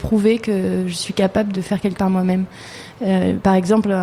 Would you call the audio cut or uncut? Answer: cut